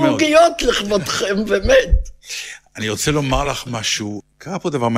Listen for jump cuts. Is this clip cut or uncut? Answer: uncut